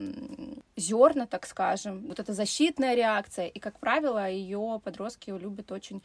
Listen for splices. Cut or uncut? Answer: uncut